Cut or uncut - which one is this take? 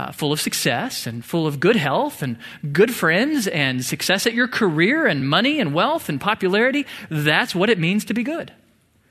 uncut